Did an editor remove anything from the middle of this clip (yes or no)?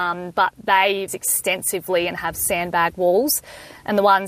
yes